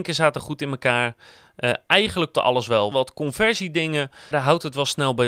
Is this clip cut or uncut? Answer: cut